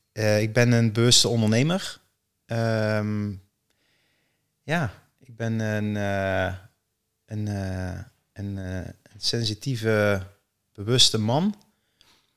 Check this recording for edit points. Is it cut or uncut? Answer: uncut